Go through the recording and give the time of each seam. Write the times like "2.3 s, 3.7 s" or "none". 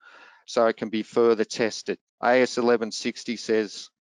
2.1 s